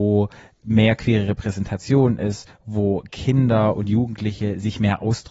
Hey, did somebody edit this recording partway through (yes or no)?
no